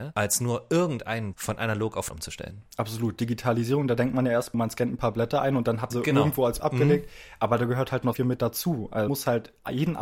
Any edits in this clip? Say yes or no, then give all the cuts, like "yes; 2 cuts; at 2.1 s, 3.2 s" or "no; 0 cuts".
yes; 7 cuts; at 1.3 s, 2.1 s, 4.5 s, 5.9 s, 6.6 s, 8.1 s, 9.1 s